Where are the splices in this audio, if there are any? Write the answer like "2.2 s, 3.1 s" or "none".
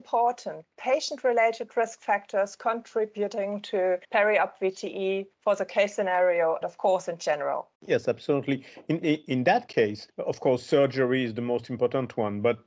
4.0 s, 5.3 s, 6.6 s, 7.7 s, 9.0 s, 10.1 s

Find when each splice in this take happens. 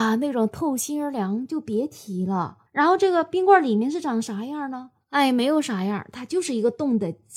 2.7 s, 5.0 s

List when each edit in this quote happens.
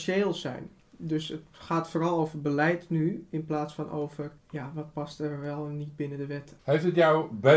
4.4 s, 6.6 s

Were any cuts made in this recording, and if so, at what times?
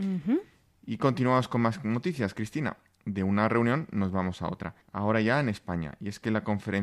4.8 s

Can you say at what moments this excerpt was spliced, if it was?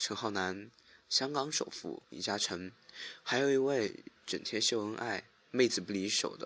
2.0 s, 4.2 s

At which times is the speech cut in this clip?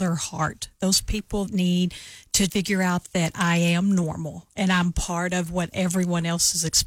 1.5 s, 2.5 s

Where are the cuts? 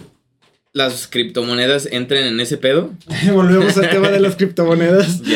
none

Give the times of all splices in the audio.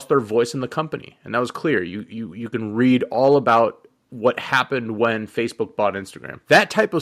none

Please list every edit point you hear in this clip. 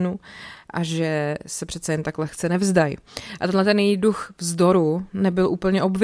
none

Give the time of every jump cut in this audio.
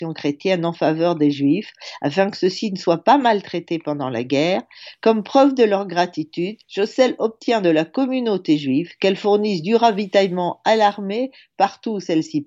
6.6 s

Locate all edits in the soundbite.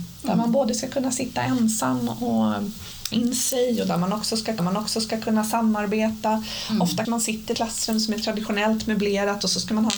3.1 s, 4.6 s, 7.0 s, 7.5 s

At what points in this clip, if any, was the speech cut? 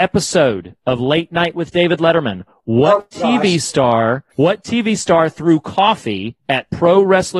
4.3 s

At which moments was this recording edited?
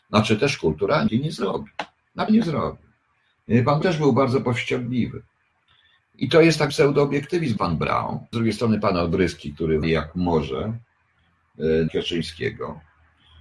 1.1 s, 2.3 s, 3.8 s, 6.7 s, 7.6 s, 8.3 s, 9.8 s, 11.9 s

